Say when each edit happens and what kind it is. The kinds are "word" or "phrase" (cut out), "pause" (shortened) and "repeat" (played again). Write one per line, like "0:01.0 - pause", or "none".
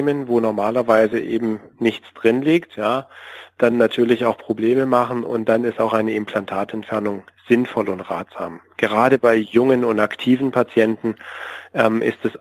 none